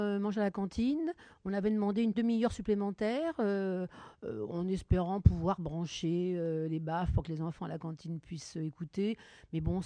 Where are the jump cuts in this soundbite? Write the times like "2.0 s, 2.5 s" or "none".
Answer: 2.1 s